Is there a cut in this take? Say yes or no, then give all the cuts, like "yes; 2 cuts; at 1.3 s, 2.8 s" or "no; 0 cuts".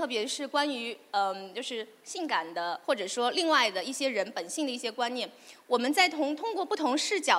yes; 1 cut; at 2.8 s